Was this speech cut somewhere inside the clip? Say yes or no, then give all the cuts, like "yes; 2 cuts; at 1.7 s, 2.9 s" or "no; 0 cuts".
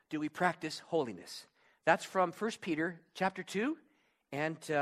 no; 0 cuts